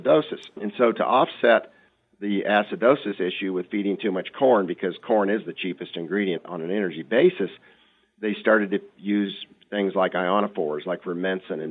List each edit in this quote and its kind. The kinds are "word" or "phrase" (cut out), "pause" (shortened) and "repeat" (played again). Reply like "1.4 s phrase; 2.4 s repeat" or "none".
none